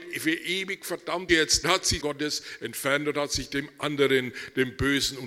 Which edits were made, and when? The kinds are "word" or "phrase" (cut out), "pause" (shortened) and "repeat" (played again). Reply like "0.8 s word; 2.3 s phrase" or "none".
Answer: 1.3 s phrase; 1.6 s phrase; 2.0 s phrase